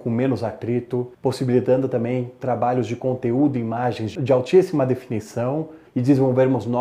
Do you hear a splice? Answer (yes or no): yes